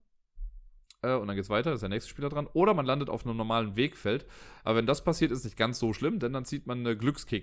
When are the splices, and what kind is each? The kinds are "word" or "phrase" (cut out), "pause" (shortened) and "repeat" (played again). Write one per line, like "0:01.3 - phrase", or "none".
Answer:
none